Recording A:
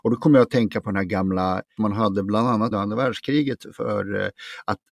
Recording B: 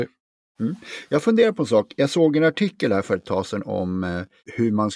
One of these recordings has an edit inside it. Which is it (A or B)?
A